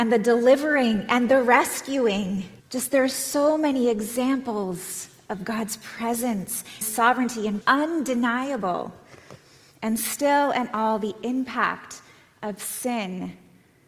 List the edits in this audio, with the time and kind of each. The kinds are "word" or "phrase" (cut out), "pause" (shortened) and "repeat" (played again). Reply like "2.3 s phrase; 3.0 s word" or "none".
2.6 s pause; 6.8 s phrase; 7.6 s phrase